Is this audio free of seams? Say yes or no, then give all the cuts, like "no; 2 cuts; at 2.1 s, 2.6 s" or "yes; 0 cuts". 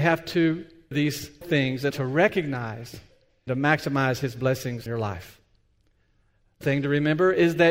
no; 6 cuts; at 0.9 s, 1.4 s, 1.9 s, 3.5 s, 4.9 s, 6.6 s